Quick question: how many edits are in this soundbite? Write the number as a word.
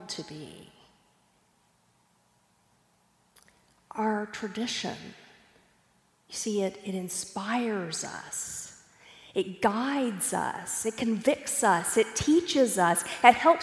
zero